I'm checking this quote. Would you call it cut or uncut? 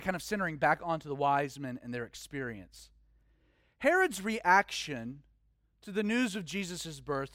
uncut